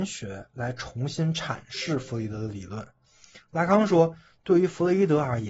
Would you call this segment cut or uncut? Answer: cut